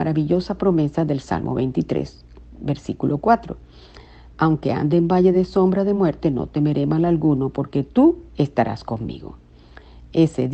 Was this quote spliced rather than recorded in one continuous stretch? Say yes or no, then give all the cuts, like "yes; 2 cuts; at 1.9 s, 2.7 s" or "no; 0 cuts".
no; 0 cuts